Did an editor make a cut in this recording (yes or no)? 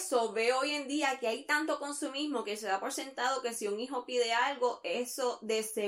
no